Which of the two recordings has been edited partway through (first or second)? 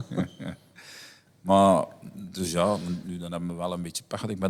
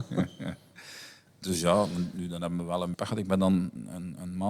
second